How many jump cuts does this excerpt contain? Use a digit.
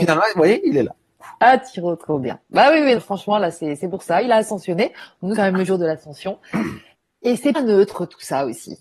4